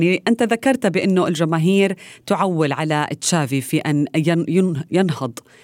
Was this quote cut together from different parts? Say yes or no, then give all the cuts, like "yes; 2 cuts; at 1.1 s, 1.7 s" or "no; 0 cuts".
no; 0 cuts